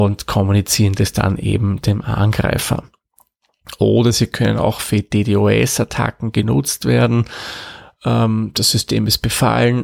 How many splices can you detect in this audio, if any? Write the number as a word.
zero